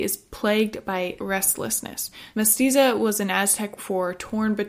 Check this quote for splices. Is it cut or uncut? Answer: cut